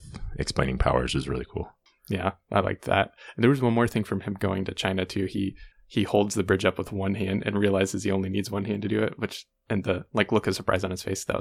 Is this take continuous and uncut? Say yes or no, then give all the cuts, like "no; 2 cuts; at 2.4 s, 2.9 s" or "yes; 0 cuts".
yes; 0 cuts